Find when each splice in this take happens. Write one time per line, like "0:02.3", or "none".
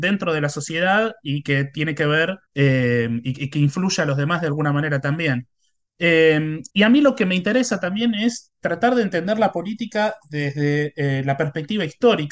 0:02.5
0:06.7